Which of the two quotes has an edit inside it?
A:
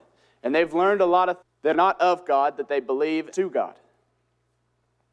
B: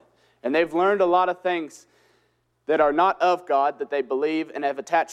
A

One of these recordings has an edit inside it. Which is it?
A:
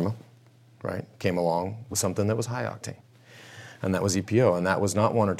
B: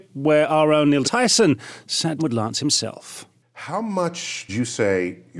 B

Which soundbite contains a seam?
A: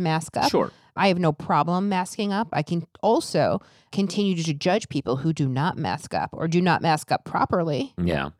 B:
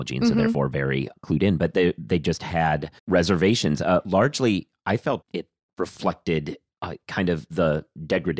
B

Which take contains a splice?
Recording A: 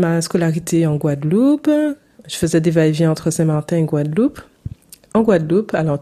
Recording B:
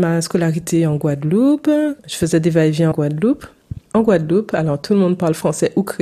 B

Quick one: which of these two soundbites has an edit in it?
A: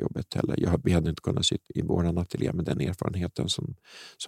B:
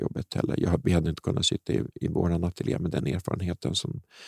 A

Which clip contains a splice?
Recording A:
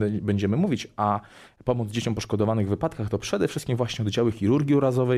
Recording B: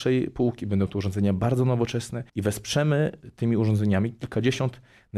B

